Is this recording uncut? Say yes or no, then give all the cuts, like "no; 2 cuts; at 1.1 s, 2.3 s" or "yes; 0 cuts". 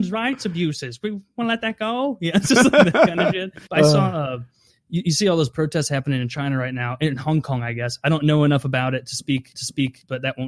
no; 2 cuts; at 3.7 s, 9.5 s